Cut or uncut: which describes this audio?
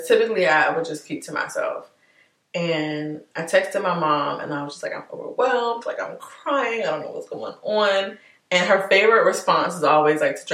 uncut